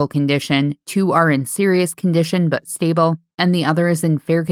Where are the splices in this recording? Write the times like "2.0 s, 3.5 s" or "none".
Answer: none